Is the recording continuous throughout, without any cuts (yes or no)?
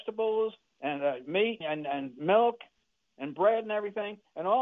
no